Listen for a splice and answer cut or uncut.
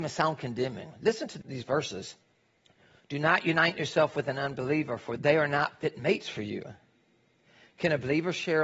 uncut